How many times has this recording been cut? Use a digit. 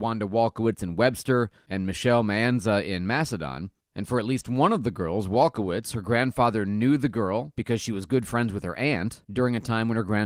0